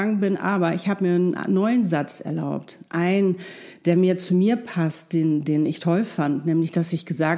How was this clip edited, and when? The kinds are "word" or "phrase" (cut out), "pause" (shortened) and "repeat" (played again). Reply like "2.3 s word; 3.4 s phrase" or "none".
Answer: none